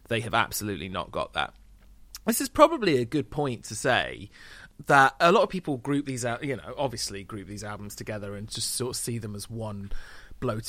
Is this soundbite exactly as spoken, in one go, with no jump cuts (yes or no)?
yes